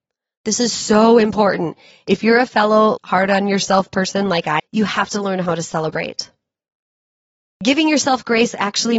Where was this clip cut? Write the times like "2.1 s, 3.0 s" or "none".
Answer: 3.0 s, 4.6 s